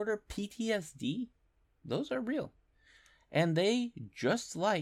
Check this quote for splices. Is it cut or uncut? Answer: cut